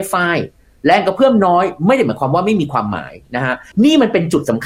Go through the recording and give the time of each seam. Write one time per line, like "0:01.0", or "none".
0:03.7